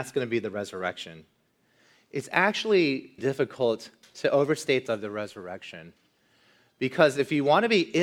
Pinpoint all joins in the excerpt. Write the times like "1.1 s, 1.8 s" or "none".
3.2 s, 4.9 s